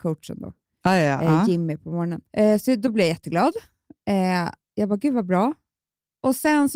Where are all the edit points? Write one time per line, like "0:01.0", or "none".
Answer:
0:02.3